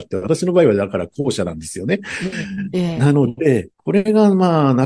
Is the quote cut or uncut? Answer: cut